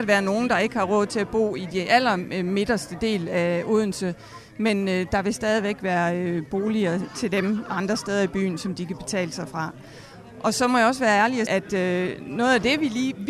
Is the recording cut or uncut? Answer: cut